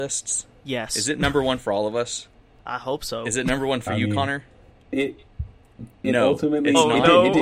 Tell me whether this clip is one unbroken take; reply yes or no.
no